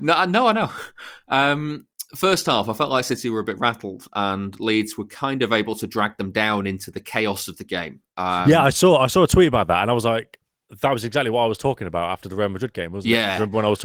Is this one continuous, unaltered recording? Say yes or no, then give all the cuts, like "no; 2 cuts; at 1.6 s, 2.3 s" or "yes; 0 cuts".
no; 1 cut; at 2.1 s